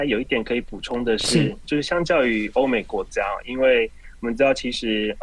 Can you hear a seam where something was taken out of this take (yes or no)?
yes